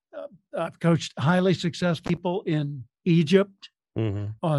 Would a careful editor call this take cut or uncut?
cut